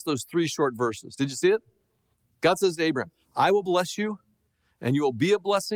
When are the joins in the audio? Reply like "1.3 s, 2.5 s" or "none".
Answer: none